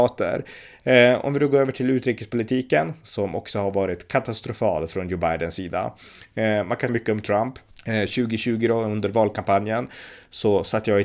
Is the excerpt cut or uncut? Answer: cut